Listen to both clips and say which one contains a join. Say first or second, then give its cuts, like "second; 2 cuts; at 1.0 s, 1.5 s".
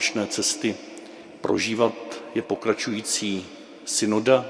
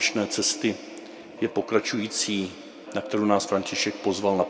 second; 3 cuts; at 1.4 s, 2.9 s, 3.5 s